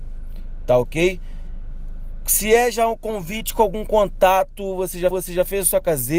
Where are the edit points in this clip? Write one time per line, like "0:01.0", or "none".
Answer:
0:05.1